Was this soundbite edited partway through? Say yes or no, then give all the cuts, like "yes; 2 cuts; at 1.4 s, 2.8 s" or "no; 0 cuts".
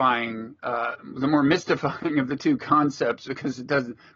no; 0 cuts